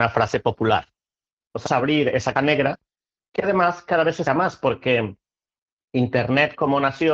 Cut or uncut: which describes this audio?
cut